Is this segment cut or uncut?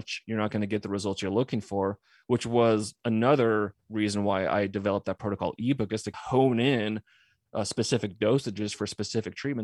uncut